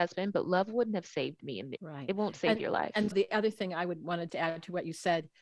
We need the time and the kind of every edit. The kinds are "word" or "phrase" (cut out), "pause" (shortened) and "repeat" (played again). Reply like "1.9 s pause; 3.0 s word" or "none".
1.8 s word; 3.1 s word; 4.3 s word

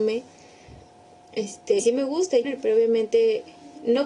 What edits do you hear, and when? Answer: 1.8 s word; 2.4 s phrase

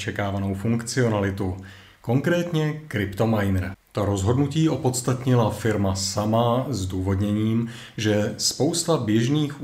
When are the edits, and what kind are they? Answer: none

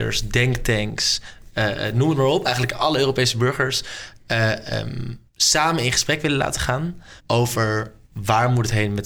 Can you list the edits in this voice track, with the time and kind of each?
5.3 s pause; 7.2 s pause

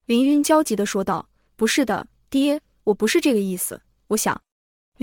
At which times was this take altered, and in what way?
none

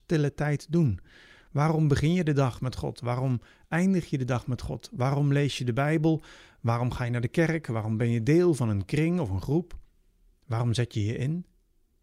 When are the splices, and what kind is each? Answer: none

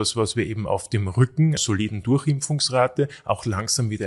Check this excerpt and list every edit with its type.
1.6 s word

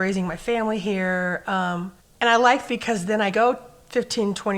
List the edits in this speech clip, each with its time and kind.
2.0 s pause; 2.7 s phrase; 3.3 s word

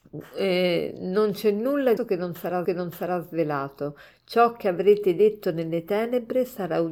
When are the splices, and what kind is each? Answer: 2.0 s word; 2.6 s repeat

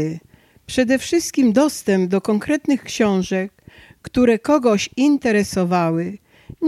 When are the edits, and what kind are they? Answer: none

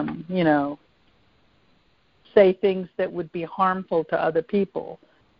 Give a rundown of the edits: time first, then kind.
none

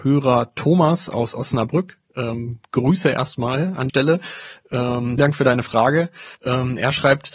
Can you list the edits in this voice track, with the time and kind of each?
2.7 s pause; 3.9 s word; 5.2 s word; 6.3 s pause

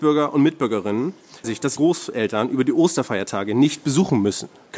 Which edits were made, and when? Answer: 1.4 s word; 1.8 s word

